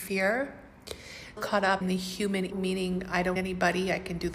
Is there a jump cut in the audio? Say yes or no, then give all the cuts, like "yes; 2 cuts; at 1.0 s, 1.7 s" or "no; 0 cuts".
yes; 4 cuts; at 1.4 s, 1.8 s, 2.5 s, 3.4 s